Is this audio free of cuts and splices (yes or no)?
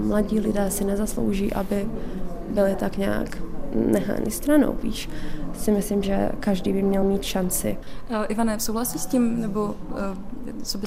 yes